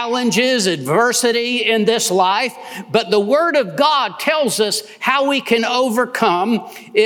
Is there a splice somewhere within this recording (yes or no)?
no